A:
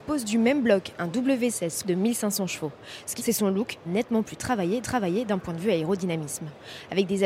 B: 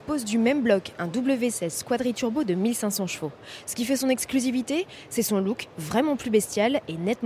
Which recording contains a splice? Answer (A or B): A